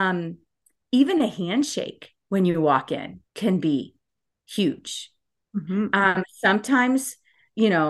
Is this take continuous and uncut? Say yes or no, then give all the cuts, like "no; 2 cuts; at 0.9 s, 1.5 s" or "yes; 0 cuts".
no; 1 cut; at 3.3 s